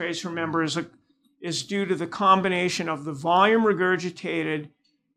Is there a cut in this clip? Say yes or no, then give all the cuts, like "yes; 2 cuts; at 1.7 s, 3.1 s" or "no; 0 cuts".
no; 0 cuts